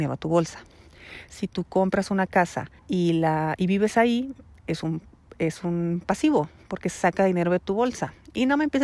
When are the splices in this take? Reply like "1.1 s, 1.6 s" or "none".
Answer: 2.8 s